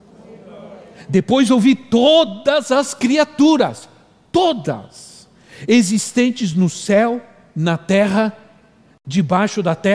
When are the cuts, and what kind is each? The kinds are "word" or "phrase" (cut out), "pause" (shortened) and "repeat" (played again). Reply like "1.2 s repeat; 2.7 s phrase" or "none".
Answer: none